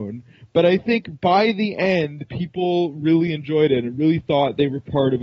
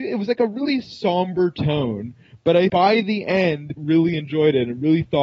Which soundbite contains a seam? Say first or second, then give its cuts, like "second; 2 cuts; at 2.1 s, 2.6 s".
second; 2 cuts; at 2.7 s, 3.8 s